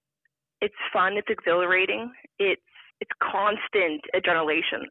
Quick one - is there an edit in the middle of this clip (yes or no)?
yes